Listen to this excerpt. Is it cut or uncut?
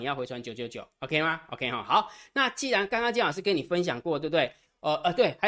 uncut